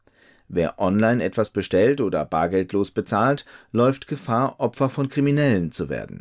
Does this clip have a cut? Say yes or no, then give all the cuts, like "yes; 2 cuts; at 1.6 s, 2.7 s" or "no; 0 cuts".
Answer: no; 0 cuts